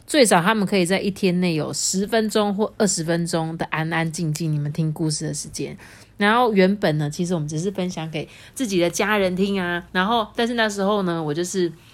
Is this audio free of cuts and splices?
no; 1 cut; at 9.9 s

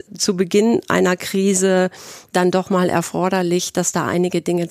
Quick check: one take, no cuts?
yes; 0 cuts

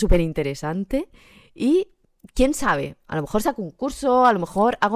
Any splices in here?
no; 0 cuts

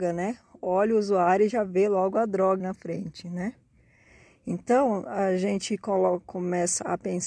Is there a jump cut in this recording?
yes; 1 cut; at 2.6 s

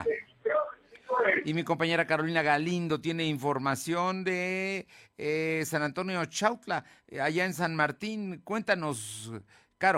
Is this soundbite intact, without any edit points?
yes; 0 cuts

